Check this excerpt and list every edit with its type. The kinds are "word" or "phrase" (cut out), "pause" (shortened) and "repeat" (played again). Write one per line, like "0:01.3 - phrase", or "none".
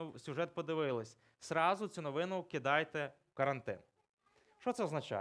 none